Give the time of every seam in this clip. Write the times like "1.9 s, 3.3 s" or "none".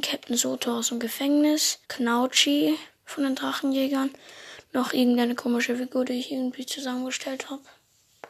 1.8 s